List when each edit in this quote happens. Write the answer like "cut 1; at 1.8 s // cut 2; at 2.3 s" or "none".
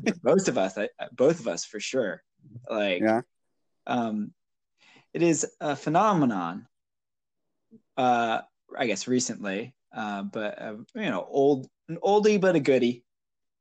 none